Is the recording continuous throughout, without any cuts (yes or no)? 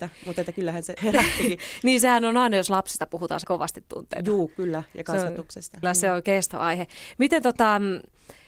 no